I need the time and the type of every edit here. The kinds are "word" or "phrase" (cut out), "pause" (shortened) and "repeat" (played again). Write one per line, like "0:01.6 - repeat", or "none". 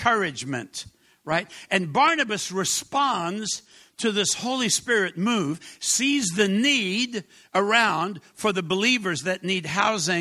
none

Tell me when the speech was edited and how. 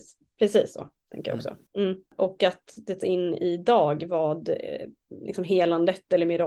0:02.1 - pause
0:03.0 - phrase

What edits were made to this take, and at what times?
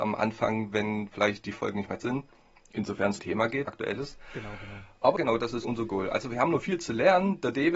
0:02.0 - word
0:03.2 - word
0:03.7 - phrase
0:05.2 - word
0:05.6 - word

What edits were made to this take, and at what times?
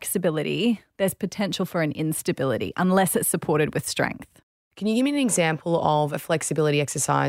none

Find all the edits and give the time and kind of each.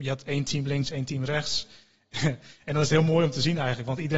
none

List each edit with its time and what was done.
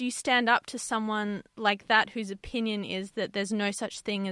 none

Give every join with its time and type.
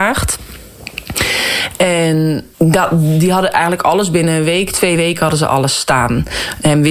0:02.5 - pause

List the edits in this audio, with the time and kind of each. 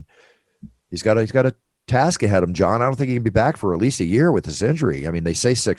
none

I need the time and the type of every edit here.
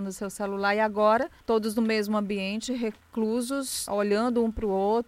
0:01.4 - pause
0:03.9 - word

